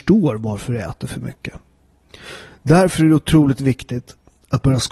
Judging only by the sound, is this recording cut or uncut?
uncut